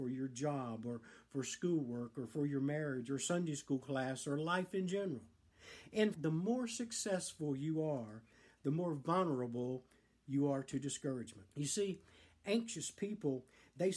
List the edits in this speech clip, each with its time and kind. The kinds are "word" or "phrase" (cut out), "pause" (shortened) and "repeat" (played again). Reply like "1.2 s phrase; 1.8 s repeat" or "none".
6.1 s word; 11.5 s pause